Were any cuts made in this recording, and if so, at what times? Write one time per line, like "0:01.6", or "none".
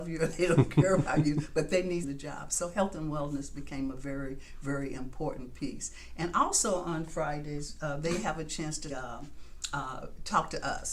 0:02.0
0:08.9